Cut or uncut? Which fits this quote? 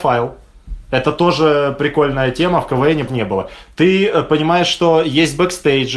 cut